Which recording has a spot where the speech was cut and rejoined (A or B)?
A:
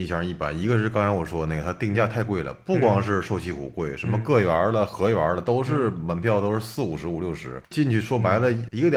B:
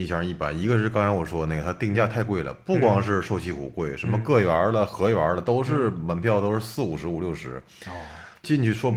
A